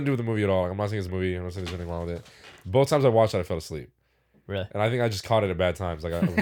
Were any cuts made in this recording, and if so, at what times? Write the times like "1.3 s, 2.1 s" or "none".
1.1 s